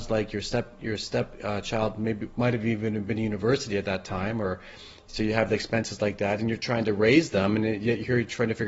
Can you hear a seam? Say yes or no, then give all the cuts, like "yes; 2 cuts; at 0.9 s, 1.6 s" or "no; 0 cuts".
no; 0 cuts